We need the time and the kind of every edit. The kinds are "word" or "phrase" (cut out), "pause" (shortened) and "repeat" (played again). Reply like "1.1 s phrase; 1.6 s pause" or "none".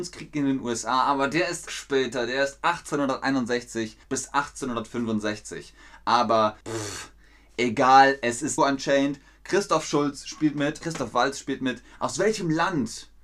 1.7 s word; 4.0 s pause; 6.6 s pause; 8.6 s phrase; 10.8 s word